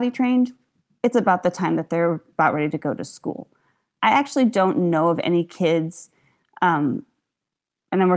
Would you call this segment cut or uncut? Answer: uncut